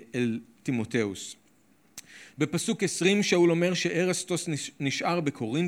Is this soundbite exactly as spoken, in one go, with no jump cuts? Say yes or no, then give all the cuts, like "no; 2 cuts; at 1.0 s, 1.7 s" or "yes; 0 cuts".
yes; 0 cuts